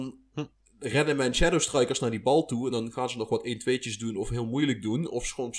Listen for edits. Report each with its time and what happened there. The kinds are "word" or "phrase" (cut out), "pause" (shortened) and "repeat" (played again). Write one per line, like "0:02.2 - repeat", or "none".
none